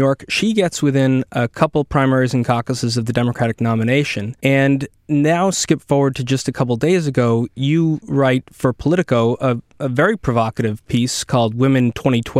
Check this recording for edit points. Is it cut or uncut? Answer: cut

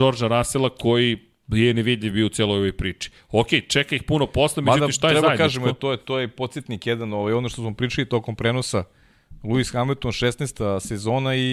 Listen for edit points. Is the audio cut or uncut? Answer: uncut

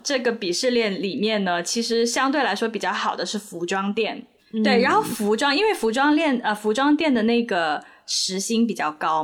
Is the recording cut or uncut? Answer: cut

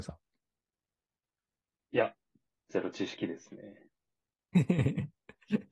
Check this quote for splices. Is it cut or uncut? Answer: uncut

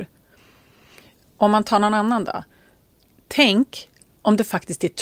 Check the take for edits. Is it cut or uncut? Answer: uncut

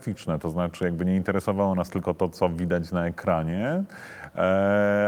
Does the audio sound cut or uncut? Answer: uncut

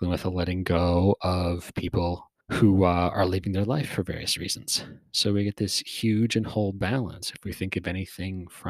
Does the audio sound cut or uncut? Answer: cut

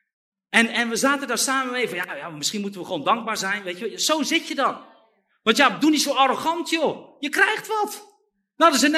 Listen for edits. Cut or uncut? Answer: uncut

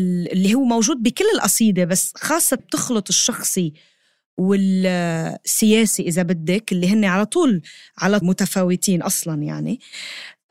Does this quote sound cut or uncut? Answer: cut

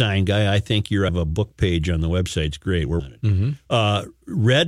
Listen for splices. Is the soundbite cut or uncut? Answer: cut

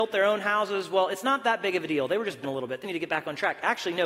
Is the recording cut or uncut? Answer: cut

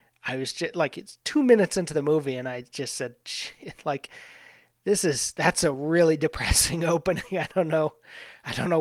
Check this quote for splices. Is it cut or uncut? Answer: uncut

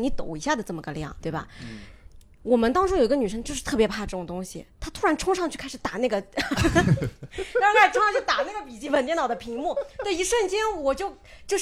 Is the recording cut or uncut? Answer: cut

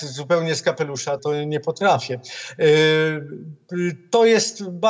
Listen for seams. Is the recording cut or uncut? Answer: cut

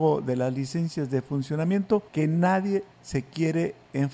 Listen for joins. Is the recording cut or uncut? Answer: cut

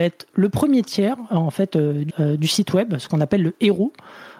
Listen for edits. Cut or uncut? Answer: cut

